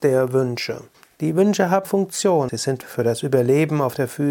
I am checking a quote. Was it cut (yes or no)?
yes